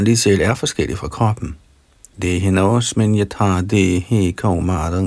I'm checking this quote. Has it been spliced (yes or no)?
no